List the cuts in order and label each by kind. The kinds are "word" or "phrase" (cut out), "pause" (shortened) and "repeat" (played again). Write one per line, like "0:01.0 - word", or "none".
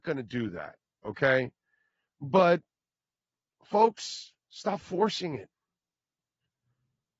0:04.4 - pause